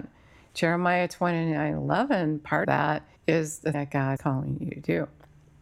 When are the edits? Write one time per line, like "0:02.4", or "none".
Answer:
0:02.6
0:03.2
0:03.7
0:04.2